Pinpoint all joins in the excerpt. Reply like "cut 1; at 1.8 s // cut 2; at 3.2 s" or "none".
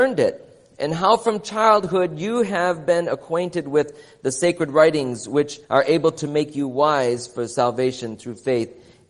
cut 1; at 5.6 s

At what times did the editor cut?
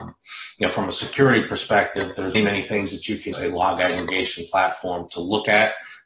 cut 1; at 2.3 s // cut 2; at 3.3 s

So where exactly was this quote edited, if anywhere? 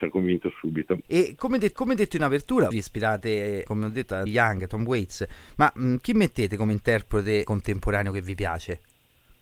cut 1; at 1.0 s // cut 2; at 1.7 s // cut 3; at 2.7 s // cut 4; at 3.6 s // cut 5; at 4.3 s // cut 6; at 7.5 s

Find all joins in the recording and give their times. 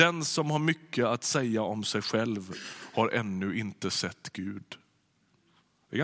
none

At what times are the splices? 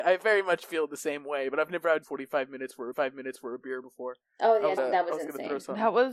cut 1; at 2.0 s // cut 2; at 2.9 s // cut 3; at 4.8 s

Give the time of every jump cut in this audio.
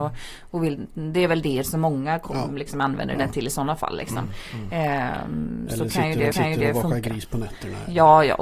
cut 1; at 6.3 s

